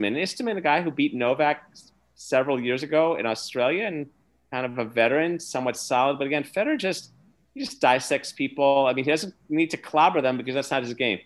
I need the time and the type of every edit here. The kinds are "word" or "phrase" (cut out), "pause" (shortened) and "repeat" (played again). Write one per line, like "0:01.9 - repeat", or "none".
none